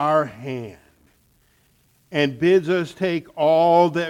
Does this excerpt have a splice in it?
no; 0 cuts

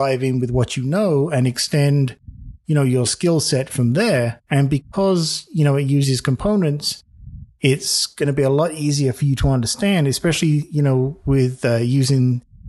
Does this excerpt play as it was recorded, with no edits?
yes; 0 cuts

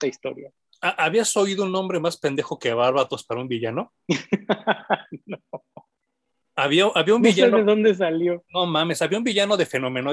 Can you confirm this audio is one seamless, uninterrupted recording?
yes; 0 cuts

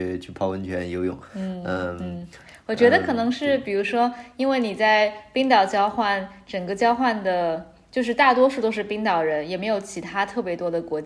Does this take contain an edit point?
no; 0 cuts

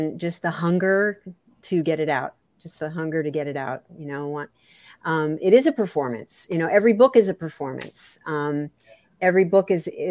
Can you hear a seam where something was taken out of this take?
no; 0 cuts

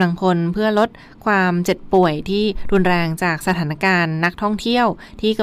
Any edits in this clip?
no; 0 cuts

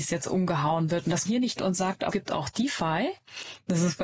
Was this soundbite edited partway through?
yes; 3 cuts; at 1.3 s, 1.6 s, 2.1 s

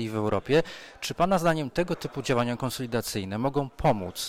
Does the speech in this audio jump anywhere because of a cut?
no; 0 cuts

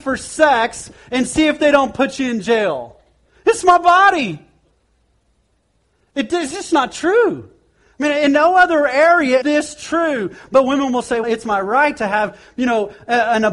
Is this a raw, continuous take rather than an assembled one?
no; 2 cuts; at 9.4 s, 11.2 s

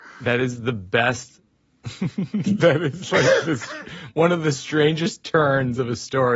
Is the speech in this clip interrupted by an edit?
no; 0 cuts

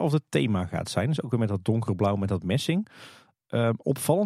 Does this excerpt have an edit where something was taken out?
no; 0 cuts

